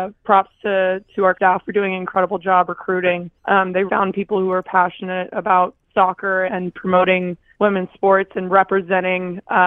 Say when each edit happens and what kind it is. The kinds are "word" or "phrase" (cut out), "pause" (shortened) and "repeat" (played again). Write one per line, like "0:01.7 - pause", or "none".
0:01.3 - word
0:03.4 - pause
0:03.9 - word
0:06.5 - word
0:07.5 - pause